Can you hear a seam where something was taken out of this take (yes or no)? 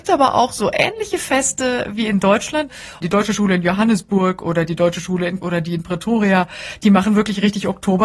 yes